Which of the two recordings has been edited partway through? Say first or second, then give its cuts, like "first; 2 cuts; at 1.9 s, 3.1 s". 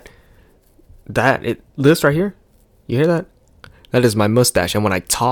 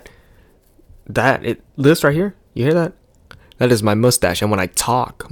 second; 1 cut; at 2.5 s